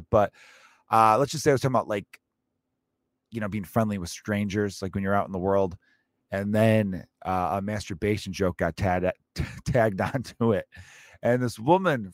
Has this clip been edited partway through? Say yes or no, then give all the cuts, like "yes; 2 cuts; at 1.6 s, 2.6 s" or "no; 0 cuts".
no; 0 cuts